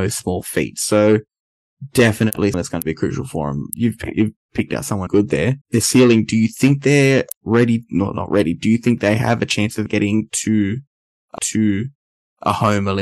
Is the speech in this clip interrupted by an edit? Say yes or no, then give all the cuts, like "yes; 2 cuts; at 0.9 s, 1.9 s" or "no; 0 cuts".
yes; 5 cuts; at 2.5 s, 5.1 s, 5.6 s, 9.9 s, 11.4 s